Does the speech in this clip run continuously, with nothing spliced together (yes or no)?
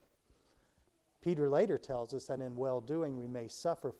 no